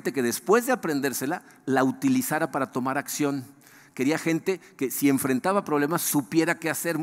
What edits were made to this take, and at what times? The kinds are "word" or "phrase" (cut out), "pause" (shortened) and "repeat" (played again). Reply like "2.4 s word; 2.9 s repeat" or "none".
none